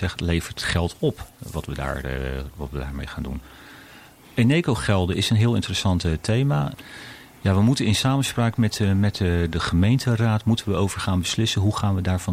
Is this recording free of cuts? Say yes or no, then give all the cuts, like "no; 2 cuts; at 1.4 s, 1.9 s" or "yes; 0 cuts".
yes; 0 cuts